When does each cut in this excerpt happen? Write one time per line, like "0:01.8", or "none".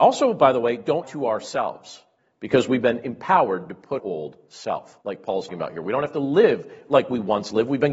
0:01.0
0:02.2
0:04.0
0:05.0
0:05.5